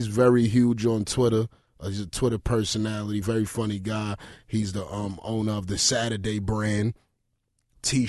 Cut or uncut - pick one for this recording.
uncut